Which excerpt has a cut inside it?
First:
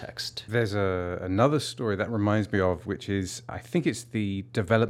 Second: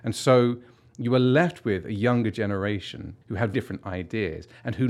second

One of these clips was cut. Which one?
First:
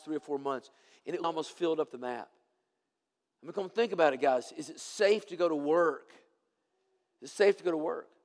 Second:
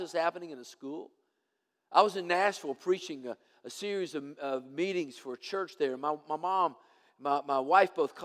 first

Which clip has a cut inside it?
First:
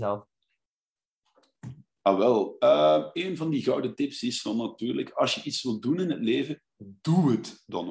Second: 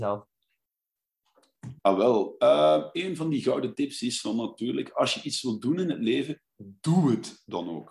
second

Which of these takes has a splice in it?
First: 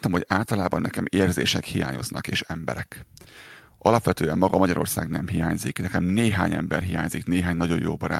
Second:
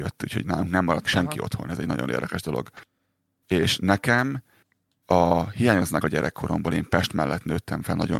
second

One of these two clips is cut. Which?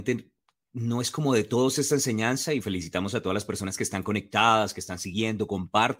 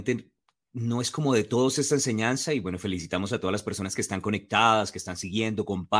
first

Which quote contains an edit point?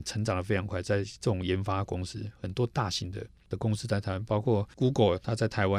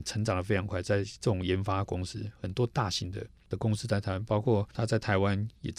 second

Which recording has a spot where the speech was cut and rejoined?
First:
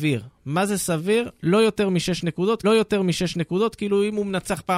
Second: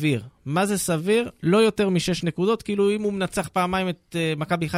first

